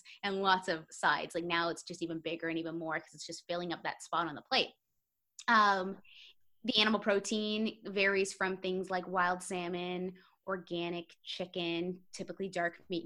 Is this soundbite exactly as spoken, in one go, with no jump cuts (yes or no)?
yes